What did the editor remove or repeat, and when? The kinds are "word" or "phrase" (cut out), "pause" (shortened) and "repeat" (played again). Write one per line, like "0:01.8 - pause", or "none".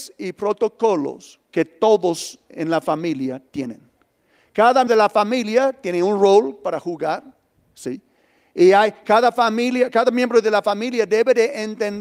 0:01.4 - pause
0:04.9 - word